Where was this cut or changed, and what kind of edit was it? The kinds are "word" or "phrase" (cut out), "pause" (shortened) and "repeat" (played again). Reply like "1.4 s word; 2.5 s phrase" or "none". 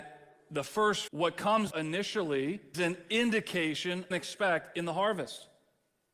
1.1 s word; 1.7 s word; 2.7 s word; 4.1 s phrase